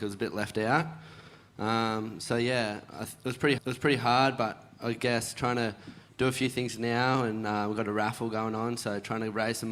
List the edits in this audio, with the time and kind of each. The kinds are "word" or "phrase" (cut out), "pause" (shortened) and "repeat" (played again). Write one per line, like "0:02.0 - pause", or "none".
0:03.6 - repeat